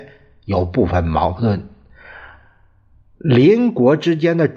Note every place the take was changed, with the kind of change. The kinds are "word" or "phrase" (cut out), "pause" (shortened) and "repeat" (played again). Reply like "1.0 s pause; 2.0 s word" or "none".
none